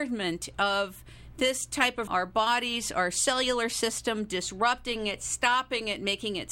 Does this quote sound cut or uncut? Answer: cut